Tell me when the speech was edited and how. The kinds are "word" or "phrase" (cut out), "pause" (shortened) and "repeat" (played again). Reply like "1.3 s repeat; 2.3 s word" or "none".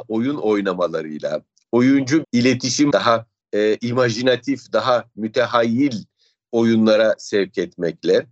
2.2 s word; 2.9 s word; 3.4 s word